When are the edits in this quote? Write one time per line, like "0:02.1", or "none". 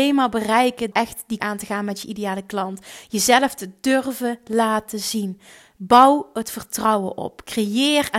0:00.9
0:01.4